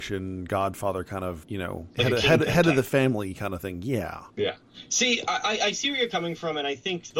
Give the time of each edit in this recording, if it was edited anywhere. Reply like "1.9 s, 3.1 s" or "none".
none